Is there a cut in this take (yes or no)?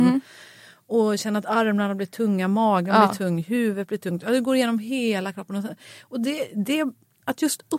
no